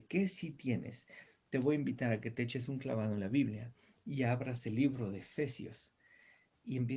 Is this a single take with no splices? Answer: yes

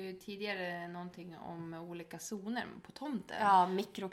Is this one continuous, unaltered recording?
yes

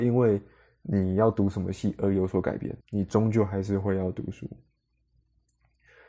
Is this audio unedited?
no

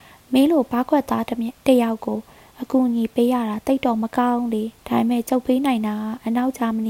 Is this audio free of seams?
no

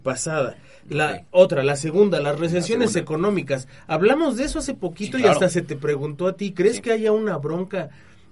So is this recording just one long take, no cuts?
yes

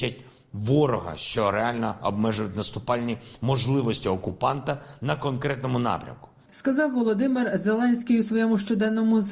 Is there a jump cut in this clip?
no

